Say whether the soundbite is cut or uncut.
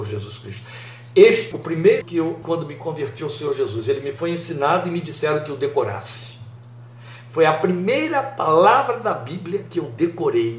cut